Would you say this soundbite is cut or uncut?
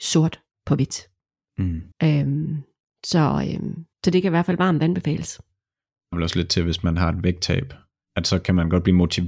cut